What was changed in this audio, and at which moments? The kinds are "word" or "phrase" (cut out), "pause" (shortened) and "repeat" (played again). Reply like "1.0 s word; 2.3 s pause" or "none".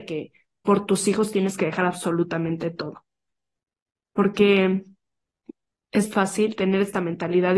6.0 s word